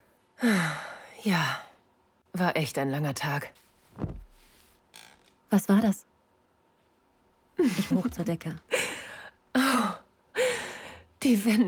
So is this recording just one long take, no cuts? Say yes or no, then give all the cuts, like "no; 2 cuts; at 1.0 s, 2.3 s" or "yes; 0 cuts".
no; 1 cut; at 7.9 s